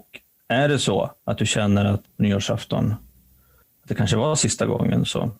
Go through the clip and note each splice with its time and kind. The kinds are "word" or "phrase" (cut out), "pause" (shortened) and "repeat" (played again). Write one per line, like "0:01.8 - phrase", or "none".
0:01.2 - pause
0:02.0 - word